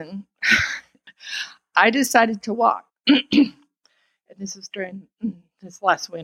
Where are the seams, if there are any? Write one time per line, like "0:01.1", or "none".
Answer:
0:02.9